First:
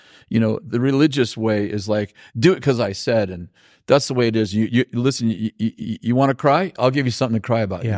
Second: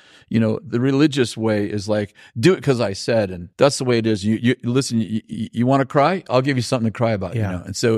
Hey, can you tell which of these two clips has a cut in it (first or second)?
second